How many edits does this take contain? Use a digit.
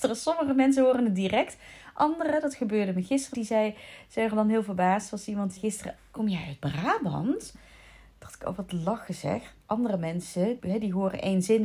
4